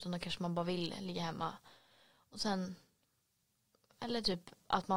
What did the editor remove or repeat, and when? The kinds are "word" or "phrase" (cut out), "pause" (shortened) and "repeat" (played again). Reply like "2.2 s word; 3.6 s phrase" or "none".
none